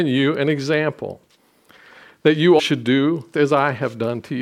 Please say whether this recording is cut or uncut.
cut